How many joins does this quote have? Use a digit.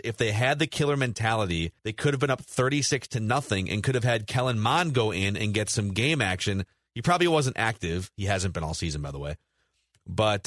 1